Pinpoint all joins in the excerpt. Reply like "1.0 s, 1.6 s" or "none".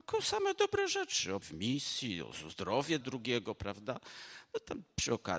1.4 s, 3.0 s